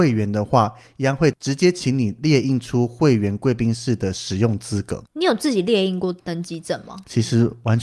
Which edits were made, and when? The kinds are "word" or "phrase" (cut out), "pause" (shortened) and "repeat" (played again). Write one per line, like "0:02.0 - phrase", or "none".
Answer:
0:05.1 - pause